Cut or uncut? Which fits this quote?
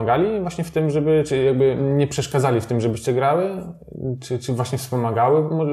uncut